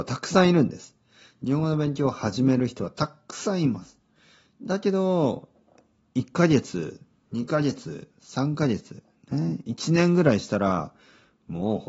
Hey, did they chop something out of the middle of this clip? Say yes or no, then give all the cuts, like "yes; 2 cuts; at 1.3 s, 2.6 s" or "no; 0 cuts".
no; 0 cuts